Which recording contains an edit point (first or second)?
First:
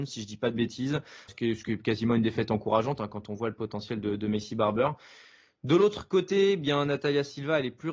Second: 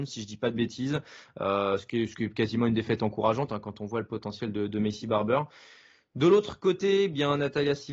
first